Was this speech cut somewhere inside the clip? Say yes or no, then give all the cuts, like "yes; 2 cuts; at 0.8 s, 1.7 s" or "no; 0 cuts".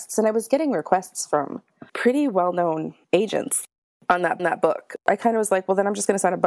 yes; 3 cuts; at 1.9 s, 3.0 s, 4.4 s